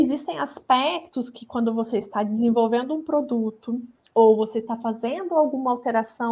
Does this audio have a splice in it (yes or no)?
no